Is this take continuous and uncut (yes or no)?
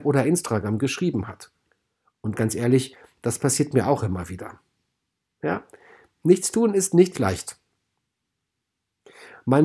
no